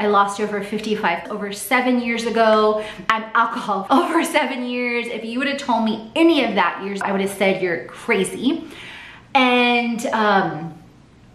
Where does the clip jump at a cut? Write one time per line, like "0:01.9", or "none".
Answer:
0:01.2
0:03.9
0:07.0